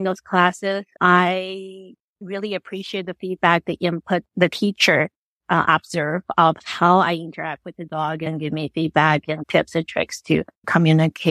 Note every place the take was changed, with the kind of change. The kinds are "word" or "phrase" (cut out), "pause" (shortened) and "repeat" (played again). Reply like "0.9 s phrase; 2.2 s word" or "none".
none